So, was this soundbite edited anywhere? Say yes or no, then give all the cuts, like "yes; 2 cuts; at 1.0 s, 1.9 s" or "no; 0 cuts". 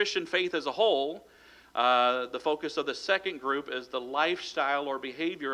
no; 0 cuts